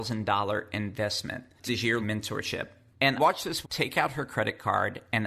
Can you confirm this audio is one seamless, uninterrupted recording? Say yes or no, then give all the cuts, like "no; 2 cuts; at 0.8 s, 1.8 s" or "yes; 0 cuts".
no; 4 cuts; at 1.7 s, 2.0 s, 3.2 s, 3.6 s